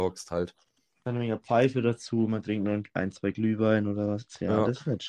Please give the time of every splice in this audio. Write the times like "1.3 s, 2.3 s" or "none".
none